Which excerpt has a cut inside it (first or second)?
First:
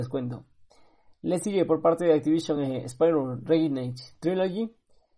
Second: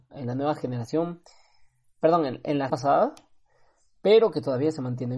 second